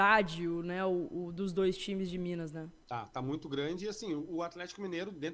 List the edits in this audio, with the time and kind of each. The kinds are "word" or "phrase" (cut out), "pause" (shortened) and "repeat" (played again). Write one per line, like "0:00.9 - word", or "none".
0:02.8 - pause